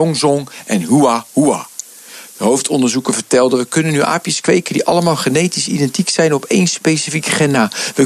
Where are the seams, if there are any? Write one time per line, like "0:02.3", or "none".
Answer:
none